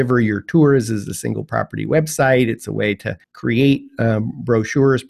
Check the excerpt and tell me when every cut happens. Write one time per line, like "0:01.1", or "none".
0:03.2